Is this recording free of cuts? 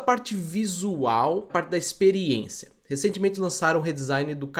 no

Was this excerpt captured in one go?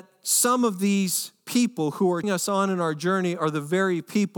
no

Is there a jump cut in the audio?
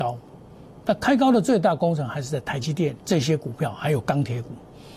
yes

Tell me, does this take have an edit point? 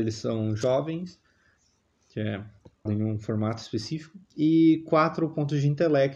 yes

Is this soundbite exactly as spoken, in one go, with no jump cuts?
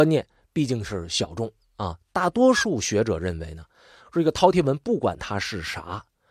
yes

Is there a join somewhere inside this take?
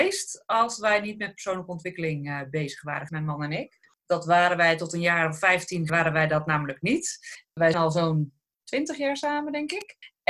yes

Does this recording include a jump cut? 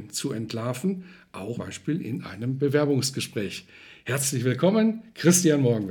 yes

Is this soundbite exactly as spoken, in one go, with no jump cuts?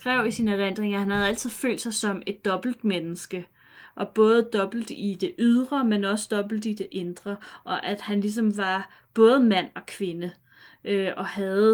yes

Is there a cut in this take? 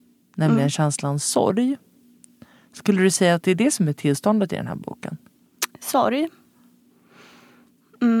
no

